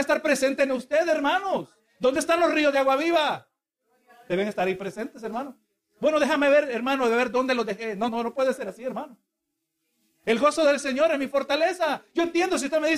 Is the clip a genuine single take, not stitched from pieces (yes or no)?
no